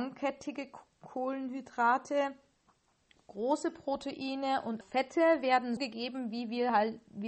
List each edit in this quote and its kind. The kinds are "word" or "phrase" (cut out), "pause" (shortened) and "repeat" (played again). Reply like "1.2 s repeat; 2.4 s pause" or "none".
3.2 s word; 4.8 s word; 5.8 s word